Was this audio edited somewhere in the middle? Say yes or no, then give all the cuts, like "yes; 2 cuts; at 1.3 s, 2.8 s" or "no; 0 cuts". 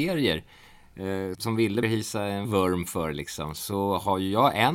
yes; 3 cuts; at 1.3 s, 1.8 s, 2.4 s